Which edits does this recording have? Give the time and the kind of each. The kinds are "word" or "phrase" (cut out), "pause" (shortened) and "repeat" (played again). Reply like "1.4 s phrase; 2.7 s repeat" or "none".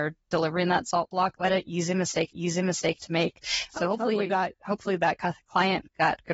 1.3 s word; 2.3 s repeat; 3.7 s word